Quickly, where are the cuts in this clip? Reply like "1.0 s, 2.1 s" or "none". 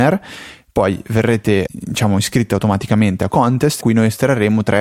1.7 s, 3.3 s, 3.8 s